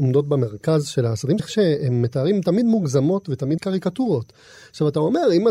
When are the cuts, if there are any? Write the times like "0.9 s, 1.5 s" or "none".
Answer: 1.4 s, 3.6 s